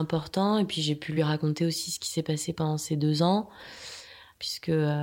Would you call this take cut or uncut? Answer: uncut